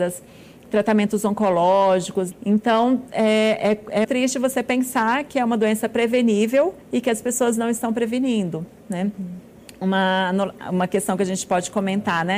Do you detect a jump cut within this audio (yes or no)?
yes